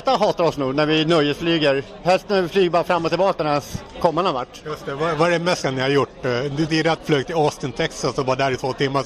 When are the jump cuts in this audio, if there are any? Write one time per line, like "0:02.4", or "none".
0:03.4
0:05.6
0:06.7
0:07.0